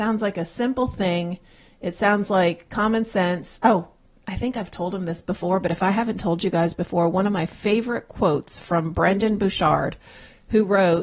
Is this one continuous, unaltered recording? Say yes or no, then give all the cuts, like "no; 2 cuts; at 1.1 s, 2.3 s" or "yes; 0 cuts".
yes; 0 cuts